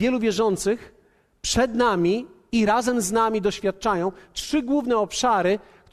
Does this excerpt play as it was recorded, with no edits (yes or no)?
yes